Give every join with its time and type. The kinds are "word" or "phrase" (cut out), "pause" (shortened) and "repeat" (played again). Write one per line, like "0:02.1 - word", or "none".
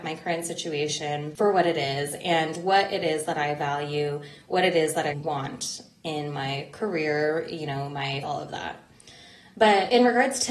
0:05.1 - word
0:08.2 - phrase